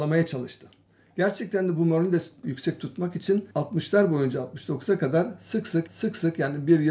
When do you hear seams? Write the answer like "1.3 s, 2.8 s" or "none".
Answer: 3.5 s, 5.9 s

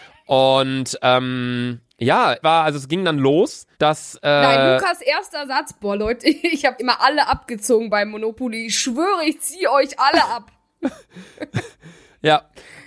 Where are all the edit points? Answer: 2.4 s, 3.7 s, 6.8 s

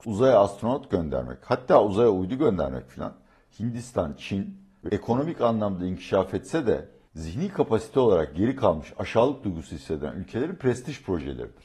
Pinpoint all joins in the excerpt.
4.9 s

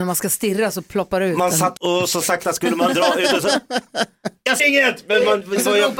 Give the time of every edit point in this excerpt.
1.8 s, 2.2 s, 4.6 s

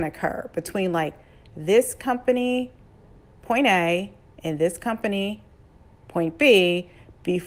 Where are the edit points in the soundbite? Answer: none

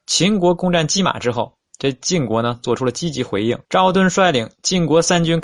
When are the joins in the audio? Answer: 1.7 s, 3.6 s

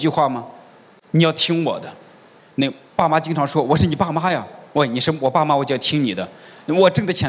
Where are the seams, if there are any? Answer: 2.4 s

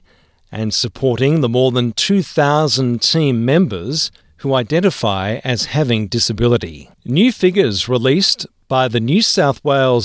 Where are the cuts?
4.2 s, 6.9 s

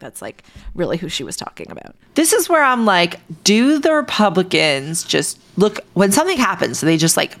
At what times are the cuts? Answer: 5.9 s

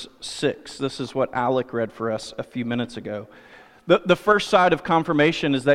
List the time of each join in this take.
none

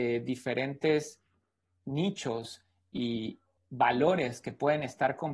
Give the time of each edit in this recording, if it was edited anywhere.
3.6 s

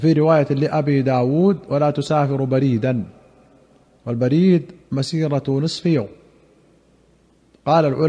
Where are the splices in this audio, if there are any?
4.8 s

